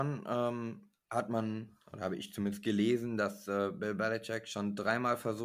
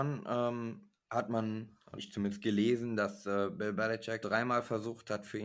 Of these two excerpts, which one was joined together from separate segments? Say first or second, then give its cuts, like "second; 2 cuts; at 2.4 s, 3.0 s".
second; 2 cuts; at 2.0 s, 4.2 s